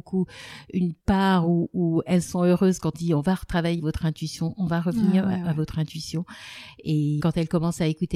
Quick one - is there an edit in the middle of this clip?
yes; 4 cuts; at 1.0 s, 2.9 s, 3.8 s, 7.2 s

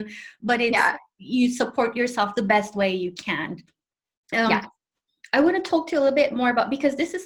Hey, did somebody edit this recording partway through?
no; 0 cuts

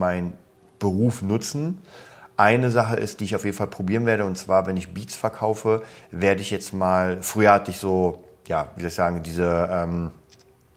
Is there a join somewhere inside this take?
no; 0 cuts

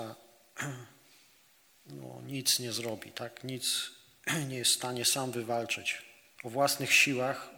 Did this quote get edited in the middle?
no; 0 cuts

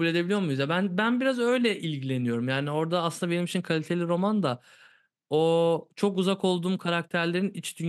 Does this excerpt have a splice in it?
no; 0 cuts

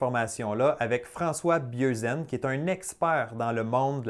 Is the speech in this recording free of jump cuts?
yes; 0 cuts

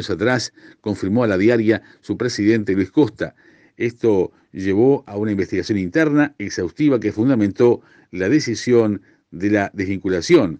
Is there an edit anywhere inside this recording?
no; 0 cuts

